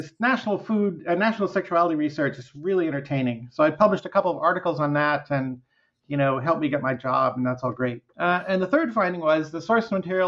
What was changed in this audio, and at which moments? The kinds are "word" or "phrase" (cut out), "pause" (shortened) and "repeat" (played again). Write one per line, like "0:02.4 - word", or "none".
0:08.1 - pause